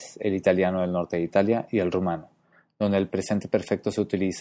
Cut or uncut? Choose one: uncut